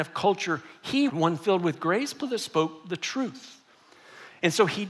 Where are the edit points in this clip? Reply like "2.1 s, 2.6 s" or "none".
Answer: 1.1 s, 2.2 s

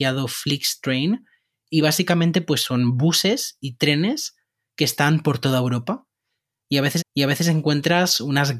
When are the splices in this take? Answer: 7.0 s

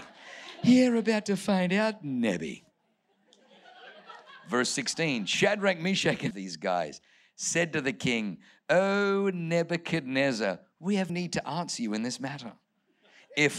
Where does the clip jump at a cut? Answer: 6.3 s, 11.1 s

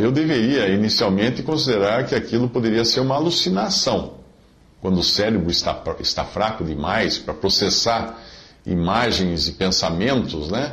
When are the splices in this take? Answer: none

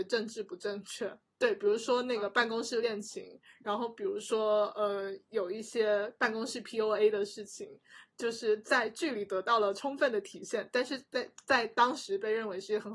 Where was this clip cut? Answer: none

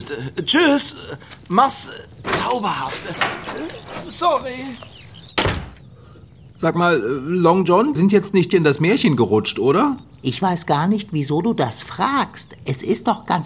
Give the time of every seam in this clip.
2.1 s, 8.0 s, 8.5 s

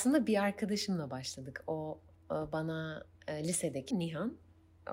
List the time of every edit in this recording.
3.1 s, 3.9 s

